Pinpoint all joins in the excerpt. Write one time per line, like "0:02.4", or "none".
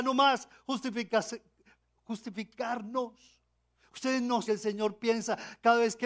0:03.6
0:04.4